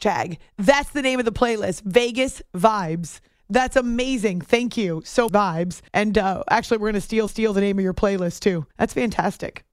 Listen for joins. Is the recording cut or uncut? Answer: cut